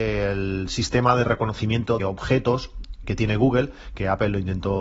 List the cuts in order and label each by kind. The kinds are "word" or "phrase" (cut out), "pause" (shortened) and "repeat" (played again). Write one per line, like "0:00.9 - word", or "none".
0:02.0 - word
0:03.0 - word